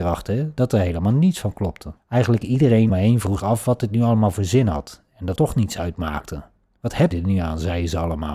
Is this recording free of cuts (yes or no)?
no